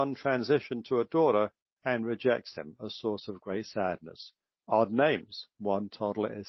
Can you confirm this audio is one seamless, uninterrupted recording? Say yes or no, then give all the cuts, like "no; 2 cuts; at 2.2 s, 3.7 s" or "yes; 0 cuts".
yes; 0 cuts